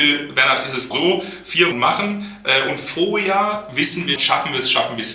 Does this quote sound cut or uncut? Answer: cut